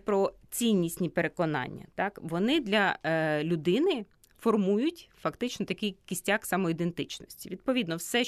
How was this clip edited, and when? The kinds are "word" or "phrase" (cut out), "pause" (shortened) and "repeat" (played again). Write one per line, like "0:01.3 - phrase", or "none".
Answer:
none